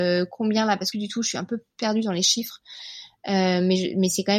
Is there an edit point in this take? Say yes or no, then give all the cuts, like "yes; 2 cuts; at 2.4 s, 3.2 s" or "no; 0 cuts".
yes; 1 cut; at 0.9 s